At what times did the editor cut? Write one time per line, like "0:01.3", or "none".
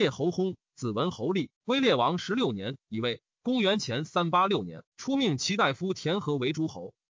0:01.6
0:04.9

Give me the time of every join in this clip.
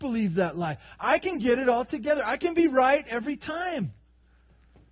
none

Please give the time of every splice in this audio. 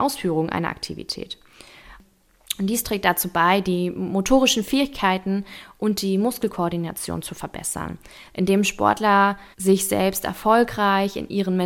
0:09.5

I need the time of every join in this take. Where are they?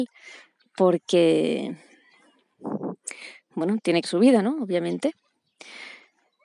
0:04.0

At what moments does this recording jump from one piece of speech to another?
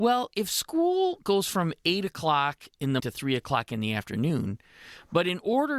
0:03.0

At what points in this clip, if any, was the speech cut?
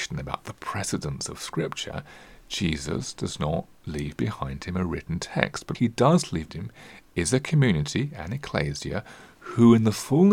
0:05.7
0:06.5

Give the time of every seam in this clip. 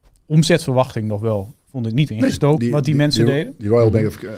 0:02.1
0:02.6

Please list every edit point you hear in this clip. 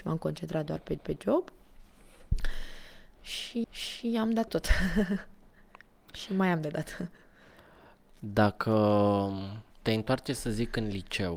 0:01.0
0:03.6
0:04.5
0:09.7

